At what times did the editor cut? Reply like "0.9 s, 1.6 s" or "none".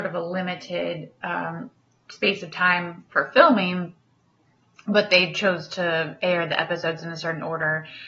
none